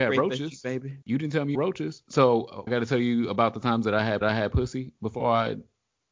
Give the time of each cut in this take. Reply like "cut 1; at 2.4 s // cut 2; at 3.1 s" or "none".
cut 1; at 1.0 s // cut 2; at 1.5 s // cut 3; at 2.7 s // cut 4; at 4.2 s